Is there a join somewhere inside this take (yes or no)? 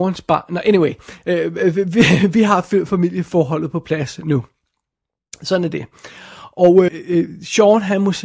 yes